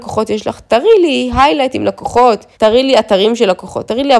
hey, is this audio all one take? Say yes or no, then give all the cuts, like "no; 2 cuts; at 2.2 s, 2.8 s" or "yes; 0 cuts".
no; 1 cut; at 2.5 s